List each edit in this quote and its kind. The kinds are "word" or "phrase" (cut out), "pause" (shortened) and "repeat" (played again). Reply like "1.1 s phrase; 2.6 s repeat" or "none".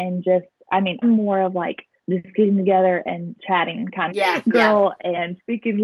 1.0 s word; 2.0 s pause; 4.1 s word